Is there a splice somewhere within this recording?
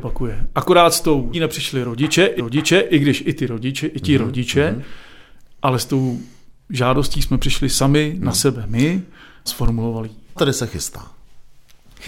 yes; 5 cuts; at 1.3 s, 2.4 s, 6.6 s, 9.5 s, 10.4 s

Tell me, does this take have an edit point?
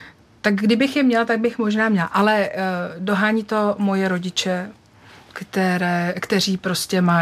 no; 0 cuts

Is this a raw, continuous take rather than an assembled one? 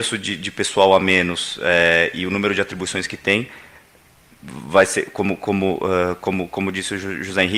yes; 0 cuts

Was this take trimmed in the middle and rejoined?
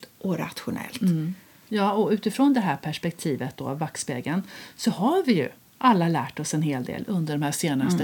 no; 0 cuts

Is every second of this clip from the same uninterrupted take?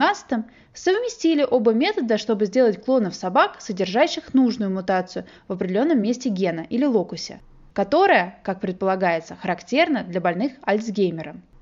yes; 0 cuts

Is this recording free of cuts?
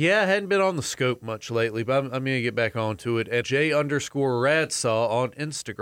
no; 1 cut; at 3.4 s

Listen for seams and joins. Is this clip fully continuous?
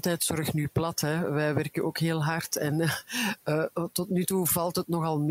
yes; 0 cuts

